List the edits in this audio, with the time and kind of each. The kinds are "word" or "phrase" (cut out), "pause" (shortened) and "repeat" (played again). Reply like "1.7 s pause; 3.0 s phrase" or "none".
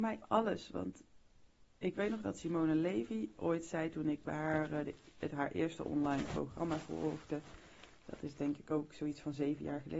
1.7 s pause